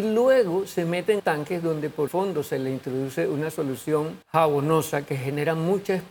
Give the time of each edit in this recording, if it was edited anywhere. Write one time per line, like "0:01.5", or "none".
0:01.2
0:02.1
0:04.2